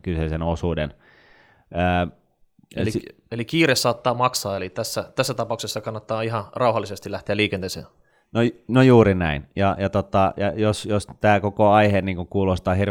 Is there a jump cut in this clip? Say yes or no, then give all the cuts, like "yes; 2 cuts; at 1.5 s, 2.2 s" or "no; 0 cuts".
no; 0 cuts